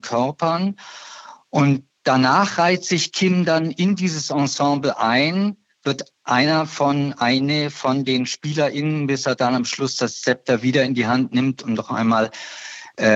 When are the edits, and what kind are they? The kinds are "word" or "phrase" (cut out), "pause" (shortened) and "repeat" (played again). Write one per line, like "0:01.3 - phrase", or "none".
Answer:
none